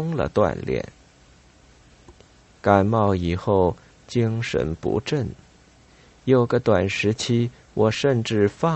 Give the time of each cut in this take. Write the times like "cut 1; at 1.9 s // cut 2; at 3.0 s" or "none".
none